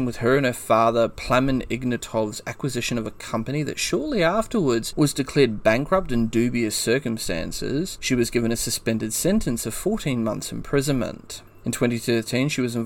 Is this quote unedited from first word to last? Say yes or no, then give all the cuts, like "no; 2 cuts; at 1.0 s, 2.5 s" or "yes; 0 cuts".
yes; 0 cuts